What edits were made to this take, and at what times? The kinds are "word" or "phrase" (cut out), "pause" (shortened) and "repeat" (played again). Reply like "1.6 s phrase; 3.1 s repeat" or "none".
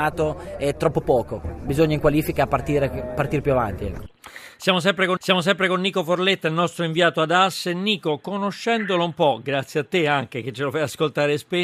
5.2 s repeat